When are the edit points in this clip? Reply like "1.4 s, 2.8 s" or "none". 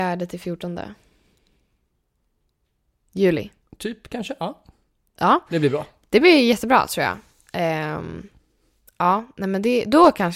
none